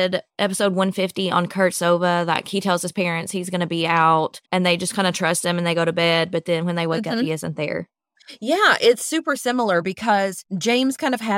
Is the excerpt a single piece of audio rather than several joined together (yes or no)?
no